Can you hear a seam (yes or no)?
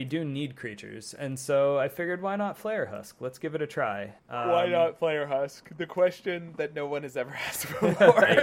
yes